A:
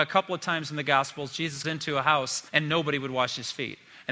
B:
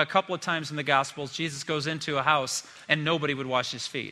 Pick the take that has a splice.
A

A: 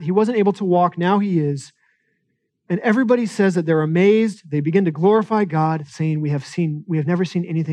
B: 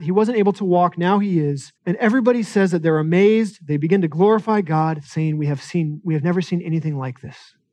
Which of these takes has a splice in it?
B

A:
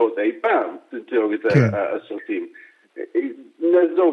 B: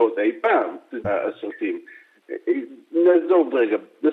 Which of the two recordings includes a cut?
B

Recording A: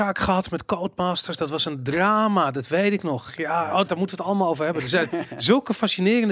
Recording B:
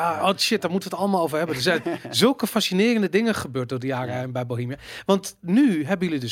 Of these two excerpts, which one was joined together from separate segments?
A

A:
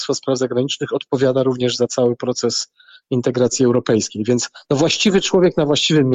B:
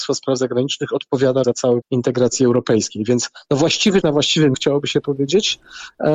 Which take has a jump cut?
B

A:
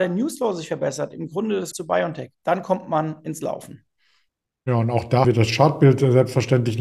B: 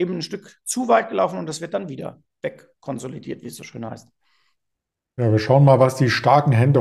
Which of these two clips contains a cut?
A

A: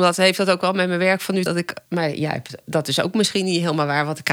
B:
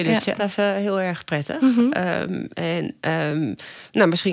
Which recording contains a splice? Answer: A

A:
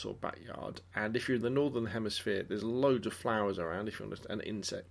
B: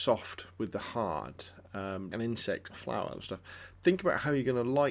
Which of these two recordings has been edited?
B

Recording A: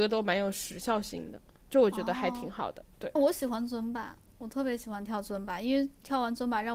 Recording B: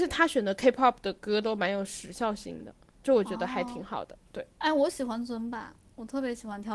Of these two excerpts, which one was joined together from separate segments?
A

